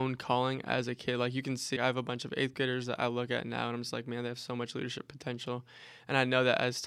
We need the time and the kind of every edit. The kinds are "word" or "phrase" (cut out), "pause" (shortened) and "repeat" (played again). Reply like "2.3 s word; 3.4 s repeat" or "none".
1.8 s word